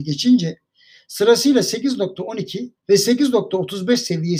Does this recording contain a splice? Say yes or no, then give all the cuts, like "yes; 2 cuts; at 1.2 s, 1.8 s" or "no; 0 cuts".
yes; 1 cut; at 2.8 s